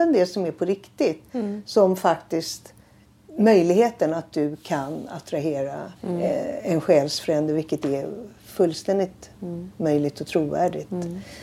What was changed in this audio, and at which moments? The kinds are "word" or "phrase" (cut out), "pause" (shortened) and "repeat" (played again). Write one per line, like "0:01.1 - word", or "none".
0:03.0 - pause
0:06.0 - pause
0:09.3 - pause